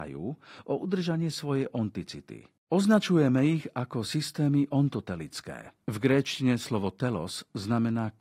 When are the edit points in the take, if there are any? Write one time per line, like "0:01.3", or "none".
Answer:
0:02.6
0:05.8